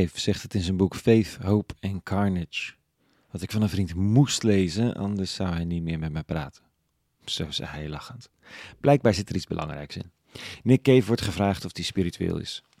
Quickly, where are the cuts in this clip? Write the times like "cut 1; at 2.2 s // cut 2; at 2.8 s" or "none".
none